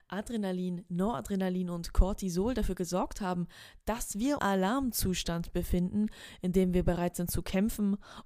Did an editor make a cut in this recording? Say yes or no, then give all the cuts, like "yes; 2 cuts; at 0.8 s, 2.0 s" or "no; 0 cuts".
yes; 1 cut; at 4.4 s